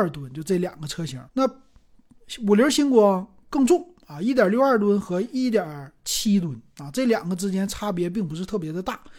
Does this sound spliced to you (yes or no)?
yes